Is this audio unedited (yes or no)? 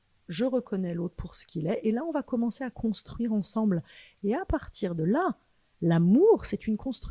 yes